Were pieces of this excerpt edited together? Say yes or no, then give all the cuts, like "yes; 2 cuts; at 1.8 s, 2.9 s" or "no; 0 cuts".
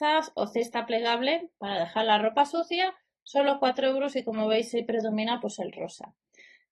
no; 0 cuts